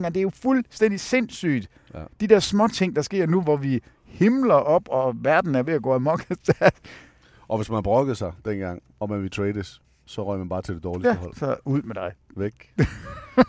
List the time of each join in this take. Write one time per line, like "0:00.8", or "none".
0:08.9